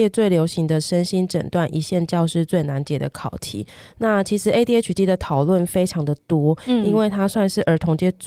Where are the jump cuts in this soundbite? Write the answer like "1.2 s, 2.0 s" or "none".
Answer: none